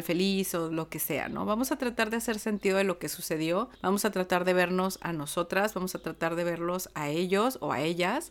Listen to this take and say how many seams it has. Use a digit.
1